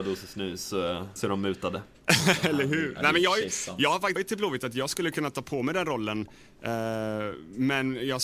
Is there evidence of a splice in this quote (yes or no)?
yes